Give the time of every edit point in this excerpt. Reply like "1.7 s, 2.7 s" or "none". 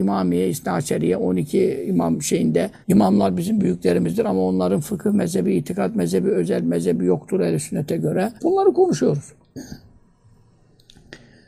2.8 s, 8.4 s

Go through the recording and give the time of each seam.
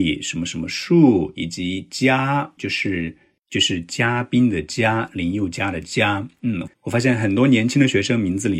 2.6 s

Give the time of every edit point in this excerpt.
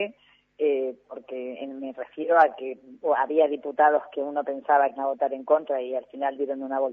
5.0 s

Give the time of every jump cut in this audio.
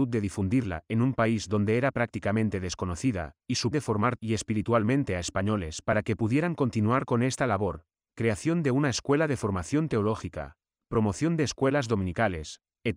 3.7 s, 4.2 s

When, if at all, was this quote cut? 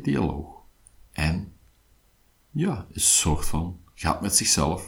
none

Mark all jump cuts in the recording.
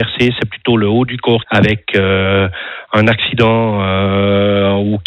1.4 s

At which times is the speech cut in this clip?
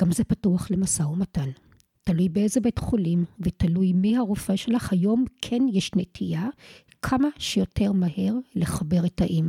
none

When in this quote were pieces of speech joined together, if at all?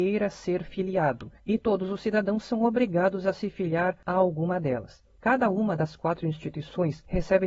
none

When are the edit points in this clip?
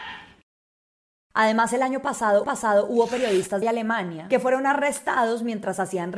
2.4 s, 3.6 s

